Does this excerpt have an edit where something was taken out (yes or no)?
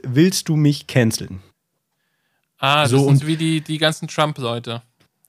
no